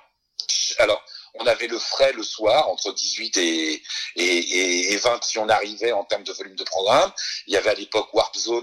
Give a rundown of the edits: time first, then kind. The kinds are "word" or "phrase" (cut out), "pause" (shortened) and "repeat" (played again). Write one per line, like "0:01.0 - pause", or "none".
0:05.2 - word